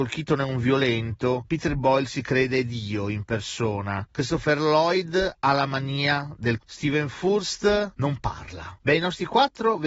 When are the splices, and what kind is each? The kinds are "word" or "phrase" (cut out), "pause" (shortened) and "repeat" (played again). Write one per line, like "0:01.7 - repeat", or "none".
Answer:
0:06.6 - word

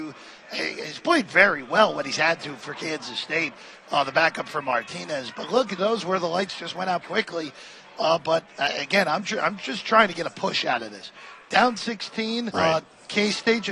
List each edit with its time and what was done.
0:05.8 - phrase
0:07.0 - word
0:12.5 - word

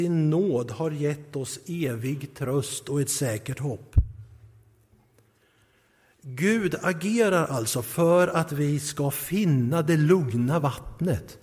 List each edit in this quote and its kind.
none

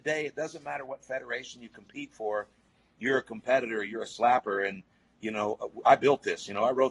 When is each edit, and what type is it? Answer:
none

